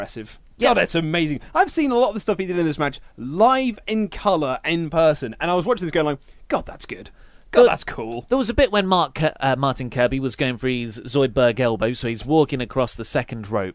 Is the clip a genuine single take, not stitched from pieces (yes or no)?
yes